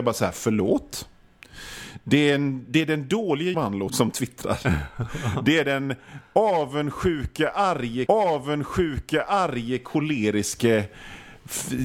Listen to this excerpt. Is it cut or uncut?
cut